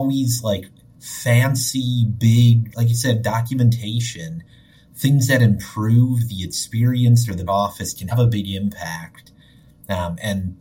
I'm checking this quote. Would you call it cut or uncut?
cut